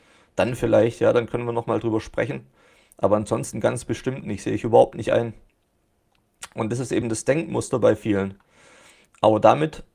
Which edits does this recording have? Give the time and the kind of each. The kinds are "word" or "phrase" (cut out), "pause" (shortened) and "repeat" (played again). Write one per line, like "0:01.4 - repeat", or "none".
none